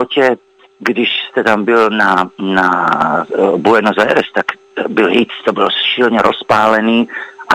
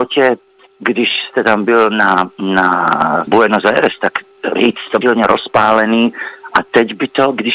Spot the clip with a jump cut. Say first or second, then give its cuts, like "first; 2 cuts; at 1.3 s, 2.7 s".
second; 3 cuts; at 3.3 s, 4.6 s, 5.0 s